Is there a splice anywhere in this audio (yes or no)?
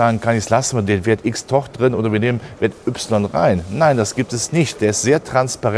no